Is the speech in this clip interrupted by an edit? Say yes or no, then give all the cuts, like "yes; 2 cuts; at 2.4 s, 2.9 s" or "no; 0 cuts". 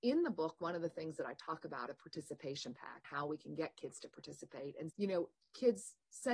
yes; 3 cuts; at 1.9 s, 3.0 s, 4.9 s